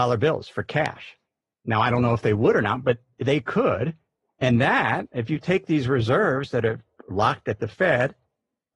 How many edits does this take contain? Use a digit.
0